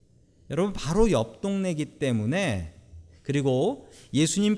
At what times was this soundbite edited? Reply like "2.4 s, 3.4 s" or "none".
none